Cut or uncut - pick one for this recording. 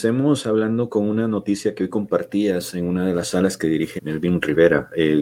cut